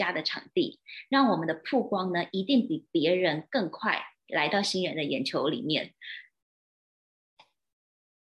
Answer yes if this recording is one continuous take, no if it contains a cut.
yes